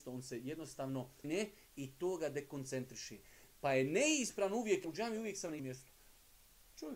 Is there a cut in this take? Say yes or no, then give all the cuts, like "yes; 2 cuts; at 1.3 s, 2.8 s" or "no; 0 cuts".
yes; 3 cuts; at 1.2 s, 4.8 s, 5.6 s